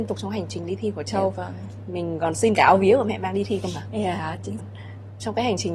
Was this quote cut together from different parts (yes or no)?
yes